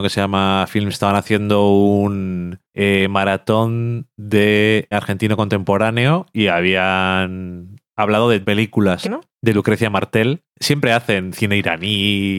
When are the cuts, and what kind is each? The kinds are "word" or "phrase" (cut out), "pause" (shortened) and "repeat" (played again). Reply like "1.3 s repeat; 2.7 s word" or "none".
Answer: 0.9 s word; 4.9 s word; 8.4 s word; 9.0 s word